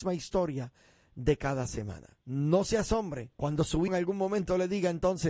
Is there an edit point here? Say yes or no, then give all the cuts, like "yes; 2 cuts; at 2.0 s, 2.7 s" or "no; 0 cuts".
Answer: yes; 3 cuts; at 2.2 s, 3.3 s, 3.9 s